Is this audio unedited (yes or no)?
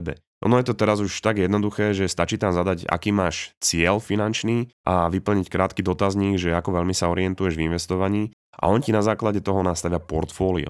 yes